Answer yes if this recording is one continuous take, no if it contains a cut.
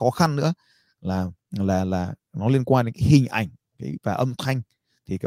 yes